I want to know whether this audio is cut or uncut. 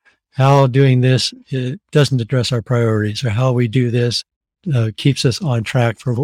uncut